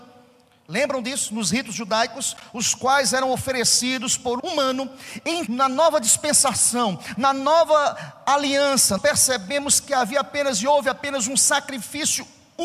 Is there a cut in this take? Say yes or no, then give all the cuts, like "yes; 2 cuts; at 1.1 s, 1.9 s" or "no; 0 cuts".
yes; 3 cuts; at 4.4 s, 5.5 s, 9.0 s